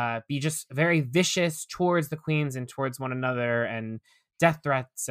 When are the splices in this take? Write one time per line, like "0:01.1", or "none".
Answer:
none